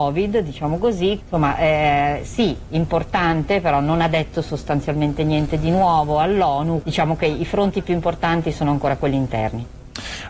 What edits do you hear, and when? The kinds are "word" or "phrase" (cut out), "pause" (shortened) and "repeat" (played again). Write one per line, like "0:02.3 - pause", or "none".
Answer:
0:01.2 - word
0:06.8 - word